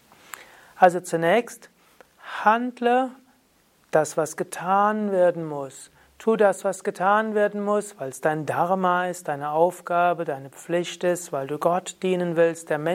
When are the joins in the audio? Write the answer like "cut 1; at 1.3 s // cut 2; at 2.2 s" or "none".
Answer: none